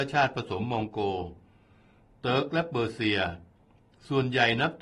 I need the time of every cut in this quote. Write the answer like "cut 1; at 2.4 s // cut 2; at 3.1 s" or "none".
none

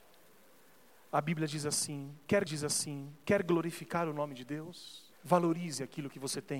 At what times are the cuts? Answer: cut 1; at 2.5 s // cut 2; at 5.1 s

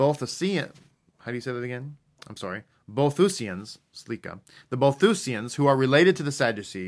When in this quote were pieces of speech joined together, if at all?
none

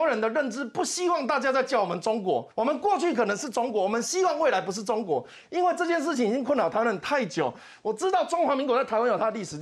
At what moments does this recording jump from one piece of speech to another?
cut 1; at 2.5 s

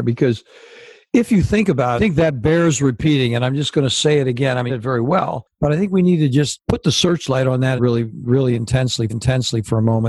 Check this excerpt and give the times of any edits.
cut 1; at 2.0 s // cut 2; at 4.7 s // cut 3; at 7.8 s // cut 4; at 9.1 s

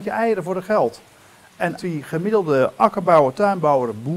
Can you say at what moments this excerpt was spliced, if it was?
cut 1; at 1.8 s

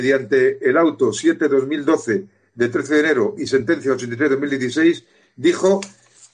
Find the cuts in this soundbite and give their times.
none

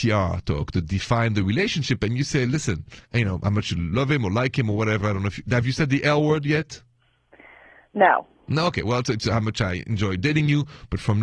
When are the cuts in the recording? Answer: cut 1; at 3.0 s // cut 2; at 9.0 s

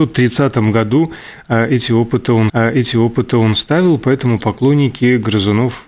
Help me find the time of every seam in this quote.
cut 1; at 2.5 s

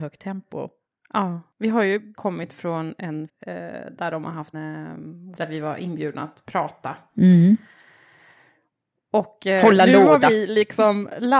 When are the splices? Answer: cut 1; at 1.5 s // cut 2; at 2.1 s // cut 3; at 3.3 s // cut 4; at 4.5 s // cut 5; at 5.4 s

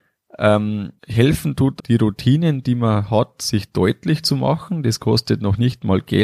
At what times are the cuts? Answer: cut 1; at 1.0 s // cut 2; at 1.8 s

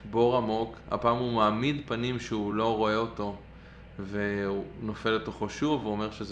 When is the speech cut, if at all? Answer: none

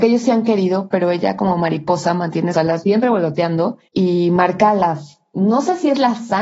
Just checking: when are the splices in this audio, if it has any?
cut 1; at 2.5 s // cut 2; at 3.9 s

